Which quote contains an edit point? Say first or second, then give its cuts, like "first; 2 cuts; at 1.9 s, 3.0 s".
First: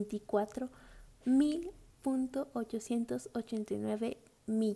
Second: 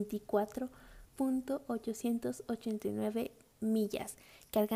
second; 1 cut; at 1.0 s